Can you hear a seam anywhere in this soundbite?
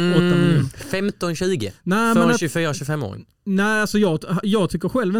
no; 0 cuts

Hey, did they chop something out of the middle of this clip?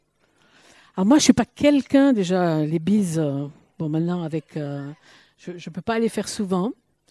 no; 0 cuts

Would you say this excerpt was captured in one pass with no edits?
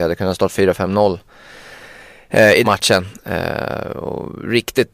no; 1 cut; at 2.6 s

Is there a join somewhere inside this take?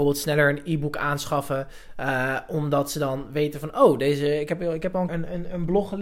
yes; 1 cut; at 5.1 s

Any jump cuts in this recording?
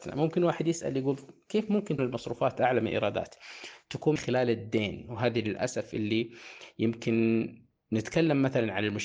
yes; 2 cuts; at 2.0 s, 4.2 s

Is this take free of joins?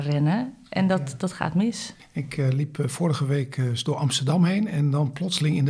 yes; 0 cuts

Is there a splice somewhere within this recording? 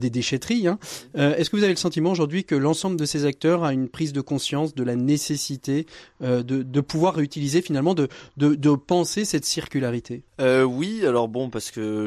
yes; 1 cut; at 10.3 s

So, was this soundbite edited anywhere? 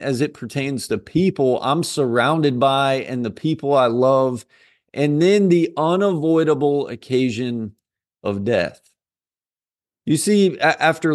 no; 0 cuts

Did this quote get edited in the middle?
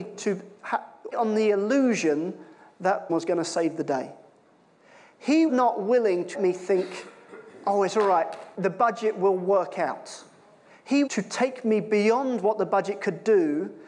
yes; 6 cuts; at 1.1 s, 3.1 s, 5.5 s, 6.3 s, 8.5 s, 11.1 s

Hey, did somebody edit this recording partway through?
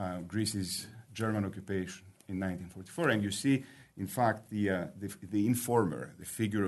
no; 0 cuts

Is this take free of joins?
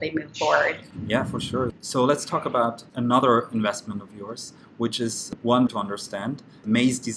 no; 3 cuts; at 1.8 s, 2.9 s, 5.7 s

